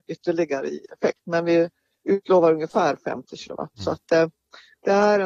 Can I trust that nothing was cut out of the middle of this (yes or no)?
yes